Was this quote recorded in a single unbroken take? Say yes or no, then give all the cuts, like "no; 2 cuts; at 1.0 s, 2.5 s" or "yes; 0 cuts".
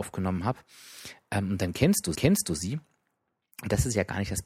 no; 1 cut; at 2.2 s